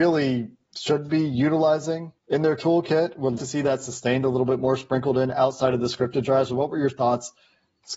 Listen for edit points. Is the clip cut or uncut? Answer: cut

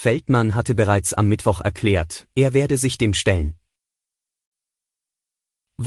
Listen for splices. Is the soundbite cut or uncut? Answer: uncut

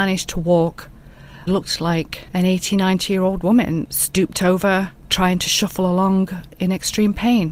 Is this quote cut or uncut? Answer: cut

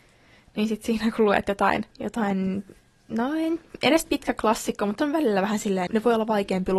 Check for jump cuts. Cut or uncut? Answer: cut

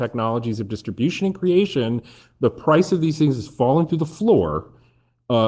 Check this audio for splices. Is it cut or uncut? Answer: uncut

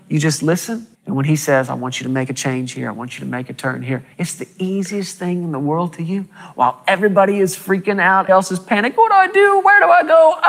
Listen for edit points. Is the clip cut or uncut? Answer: cut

